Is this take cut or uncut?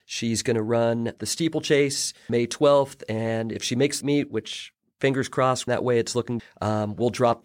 cut